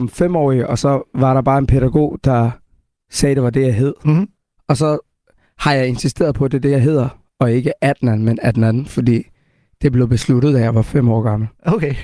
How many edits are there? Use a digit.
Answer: 0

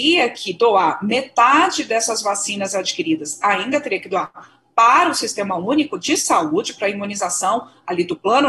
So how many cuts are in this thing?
0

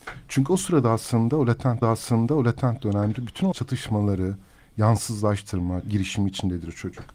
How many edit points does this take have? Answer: 3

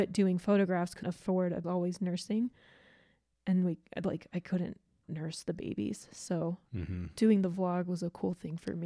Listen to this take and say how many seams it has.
3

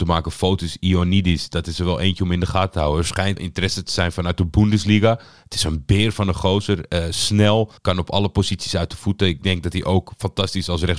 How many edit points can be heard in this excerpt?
2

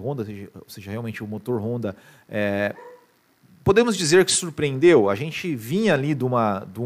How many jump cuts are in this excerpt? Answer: 0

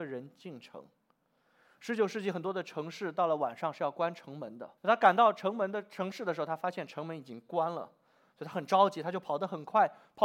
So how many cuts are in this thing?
1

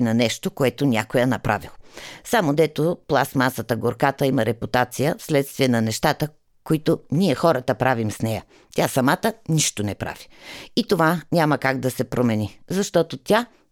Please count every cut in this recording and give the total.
0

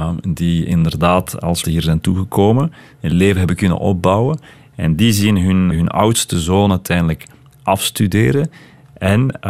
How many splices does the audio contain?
2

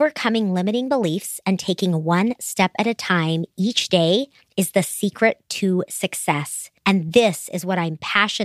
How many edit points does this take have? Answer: 2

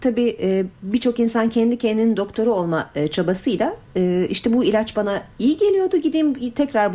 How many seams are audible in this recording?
0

